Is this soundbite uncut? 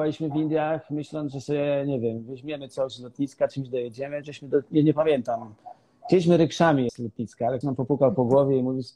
no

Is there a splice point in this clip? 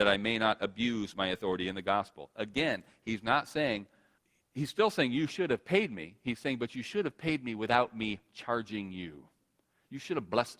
yes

